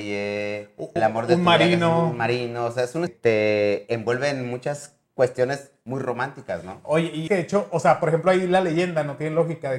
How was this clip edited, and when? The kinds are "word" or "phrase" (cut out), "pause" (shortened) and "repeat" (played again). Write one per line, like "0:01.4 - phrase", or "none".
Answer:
0:01.0 - word
0:03.1 - phrase
0:05.0 - pause
0:07.3 - word

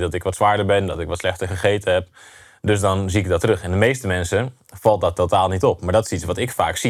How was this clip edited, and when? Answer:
none

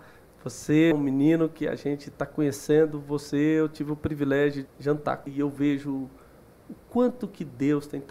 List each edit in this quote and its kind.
0:00.9 - word
0:04.6 - word
0:05.3 - word

